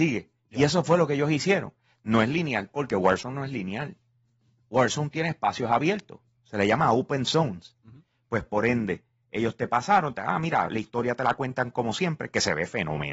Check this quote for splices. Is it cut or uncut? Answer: cut